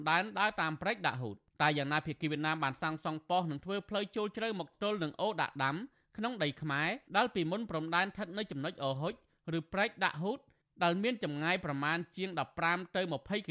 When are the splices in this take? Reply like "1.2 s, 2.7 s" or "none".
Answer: 7.1 s